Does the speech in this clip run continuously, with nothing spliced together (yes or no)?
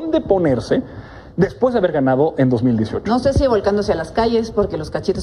yes